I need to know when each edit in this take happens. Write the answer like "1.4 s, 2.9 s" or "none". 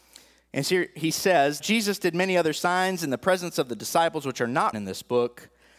1.6 s, 4.7 s